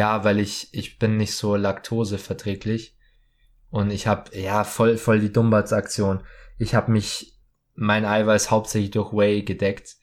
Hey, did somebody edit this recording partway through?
no; 0 cuts

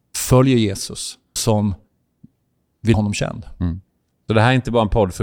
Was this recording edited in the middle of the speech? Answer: yes; 2 cuts; at 1.4 s, 2.9 s

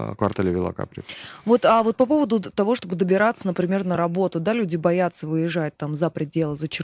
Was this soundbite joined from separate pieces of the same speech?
no; 0 cuts

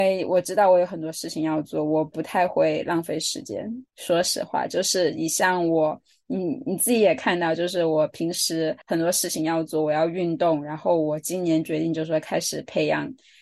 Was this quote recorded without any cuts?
no; 2 cuts; at 3.9 s, 8.8 s

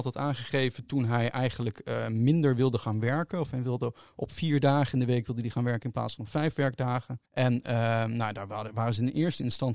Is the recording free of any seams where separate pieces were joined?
no; 1 cut; at 7.3 s

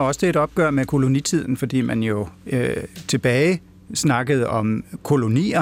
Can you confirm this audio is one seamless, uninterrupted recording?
yes; 0 cuts

